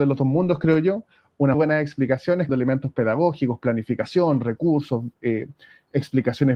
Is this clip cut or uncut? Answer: cut